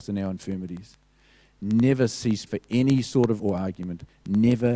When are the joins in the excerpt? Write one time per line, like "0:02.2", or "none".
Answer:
0:02.5
0:03.4